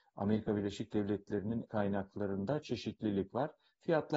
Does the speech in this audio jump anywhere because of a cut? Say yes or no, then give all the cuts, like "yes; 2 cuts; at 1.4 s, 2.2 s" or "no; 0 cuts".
yes; 1 cut; at 1.7 s